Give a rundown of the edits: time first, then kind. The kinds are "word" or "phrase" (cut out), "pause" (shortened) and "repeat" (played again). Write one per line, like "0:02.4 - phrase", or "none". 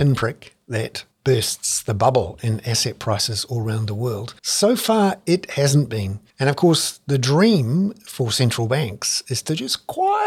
0:01.1 - pause
0:04.4 - pause
0:06.3 - pause